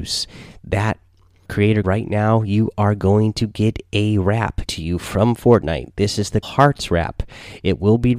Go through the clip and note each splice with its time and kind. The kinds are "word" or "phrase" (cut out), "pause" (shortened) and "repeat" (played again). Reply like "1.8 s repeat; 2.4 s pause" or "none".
1.5 s word; 1.8 s word; 4.7 s word; 6.4 s word